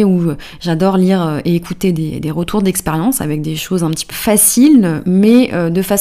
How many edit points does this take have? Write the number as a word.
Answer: one